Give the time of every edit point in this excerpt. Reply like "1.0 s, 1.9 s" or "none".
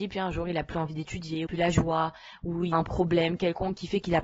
1.5 s, 2.7 s

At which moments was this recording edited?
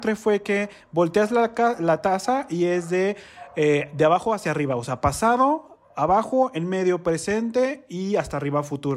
none

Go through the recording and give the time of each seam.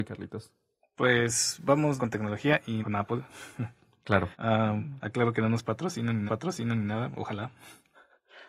2.0 s, 2.8 s, 4.3 s, 6.3 s

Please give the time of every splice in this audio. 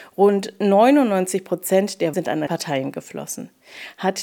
2.1 s, 2.5 s

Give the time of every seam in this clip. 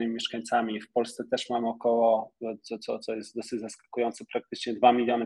none

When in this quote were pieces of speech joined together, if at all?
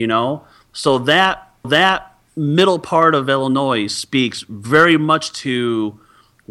1.6 s

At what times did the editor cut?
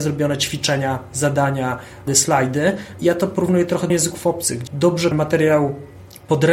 2.1 s, 3.0 s, 3.9 s, 4.7 s, 5.1 s

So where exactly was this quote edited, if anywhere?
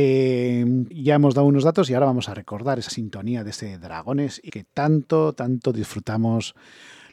0.9 s, 2.9 s, 4.5 s

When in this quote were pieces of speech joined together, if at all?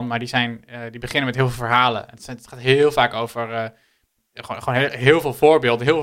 none

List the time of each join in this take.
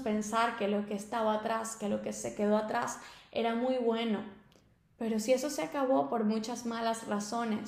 none

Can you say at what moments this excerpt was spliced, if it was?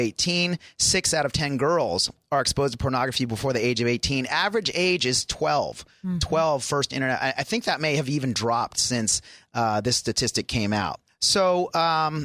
11.1 s

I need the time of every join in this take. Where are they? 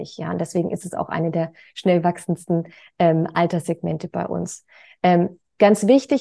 none

